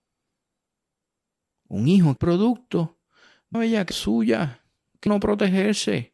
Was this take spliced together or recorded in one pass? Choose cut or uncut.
cut